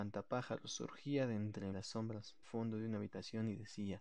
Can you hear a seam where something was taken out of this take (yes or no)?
yes